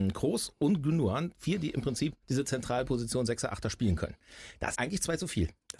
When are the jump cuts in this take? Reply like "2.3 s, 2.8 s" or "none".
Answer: 2.2 s, 4.7 s